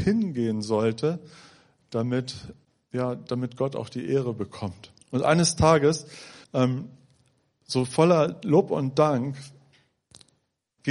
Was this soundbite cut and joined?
yes; 3 cuts; at 2.6 s, 5.0 s, 6.4 s

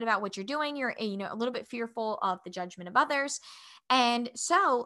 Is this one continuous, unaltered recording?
yes; 0 cuts

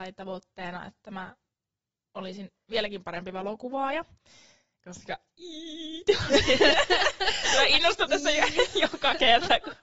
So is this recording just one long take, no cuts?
yes; 0 cuts

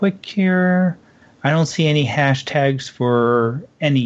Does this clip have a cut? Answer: no; 0 cuts

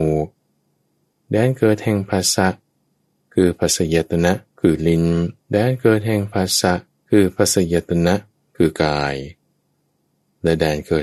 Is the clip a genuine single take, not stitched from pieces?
no; 3 cuts; at 4.5 s, 5.4 s, 6.9 s

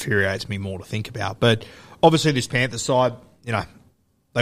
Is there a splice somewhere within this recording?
no; 0 cuts

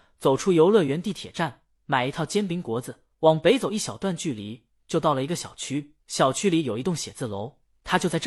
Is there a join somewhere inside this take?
yes; 2 cuts; at 3.1 s, 6.0 s

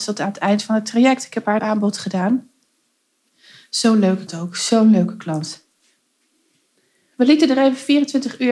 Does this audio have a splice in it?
yes; 2 cuts; at 1.6 s, 4.3 s

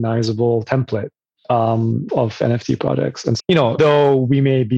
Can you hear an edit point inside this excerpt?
yes; 3 cuts; at 2.1 s, 3.4 s, 3.8 s

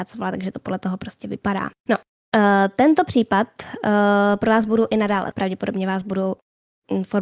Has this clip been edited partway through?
yes; 2 cuts; at 1.8 s, 5.3 s

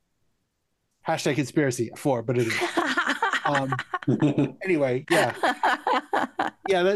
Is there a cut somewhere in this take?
yes; 1 cut; at 1.9 s

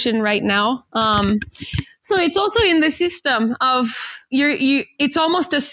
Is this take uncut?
yes; 0 cuts

